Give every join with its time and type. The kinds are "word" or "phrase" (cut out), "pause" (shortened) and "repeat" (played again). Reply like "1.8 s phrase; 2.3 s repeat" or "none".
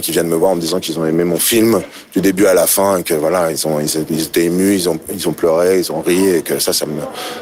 none